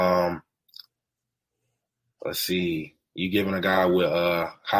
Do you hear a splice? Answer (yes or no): no